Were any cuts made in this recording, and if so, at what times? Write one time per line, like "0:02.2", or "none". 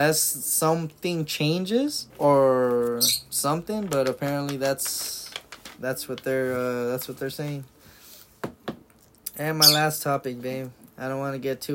0:02.1

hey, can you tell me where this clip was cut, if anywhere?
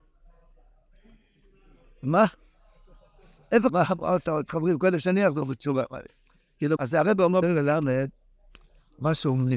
0:03.7
0:04.5
0:06.8
0:07.4

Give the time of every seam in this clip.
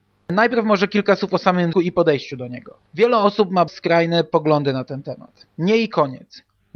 0:01.7
0:02.9
0:03.7
0:05.5

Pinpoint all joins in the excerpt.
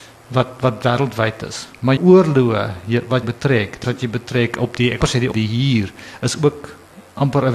0:02.0
0:03.2
0:03.8
0:05.0
0:05.3

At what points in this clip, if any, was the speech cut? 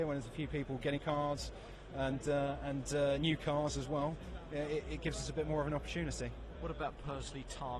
0:01.0

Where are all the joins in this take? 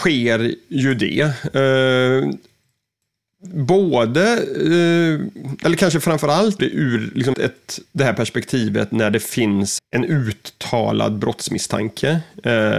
0:06.6
0:07.3
0:09.8

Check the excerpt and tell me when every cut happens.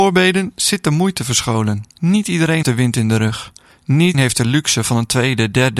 0:01.9
0:02.6
0:04.1

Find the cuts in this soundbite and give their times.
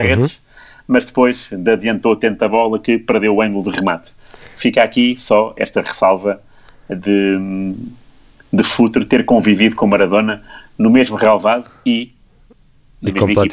none

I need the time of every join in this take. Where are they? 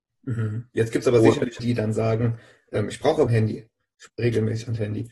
0:01.6
0:03.3
0:04.1

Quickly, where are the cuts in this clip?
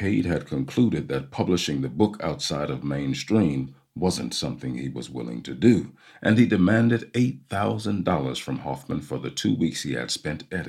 none

